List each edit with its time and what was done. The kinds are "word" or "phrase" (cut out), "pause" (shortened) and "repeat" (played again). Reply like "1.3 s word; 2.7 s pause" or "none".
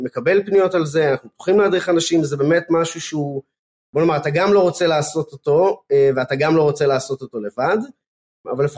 none